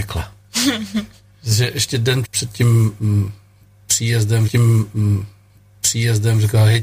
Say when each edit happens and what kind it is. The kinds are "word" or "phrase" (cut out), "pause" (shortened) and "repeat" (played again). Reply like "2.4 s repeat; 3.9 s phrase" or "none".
2.2 s word; 4.5 s repeat